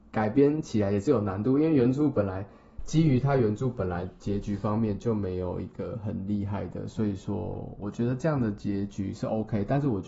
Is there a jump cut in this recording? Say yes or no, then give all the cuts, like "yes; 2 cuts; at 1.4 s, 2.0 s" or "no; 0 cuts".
no; 0 cuts